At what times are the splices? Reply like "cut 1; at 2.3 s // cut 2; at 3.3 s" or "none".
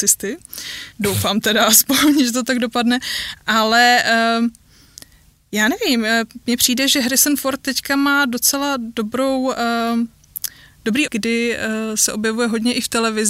cut 1; at 0.9 s // cut 2; at 11.1 s